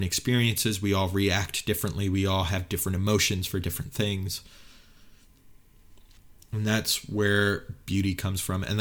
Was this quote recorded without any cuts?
no; 1 cut; at 6.2 s

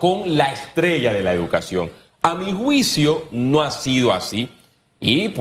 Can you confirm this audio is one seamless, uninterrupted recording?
yes; 0 cuts

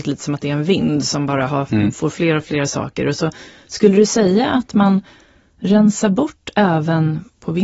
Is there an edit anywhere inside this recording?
no; 0 cuts

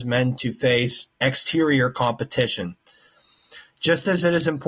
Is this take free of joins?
no; 1 cut; at 1.1 s

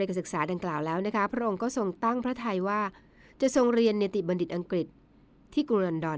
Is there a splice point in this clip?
no; 0 cuts

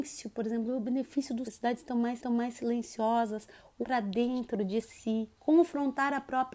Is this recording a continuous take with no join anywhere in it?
no; 4 cuts; at 1.4 s, 2.2 s, 3.8 s, 5.4 s

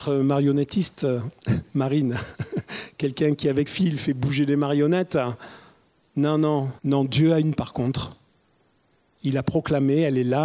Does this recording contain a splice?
yes; 3 cuts; at 3.7 s, 6.8 s, 7.6 s

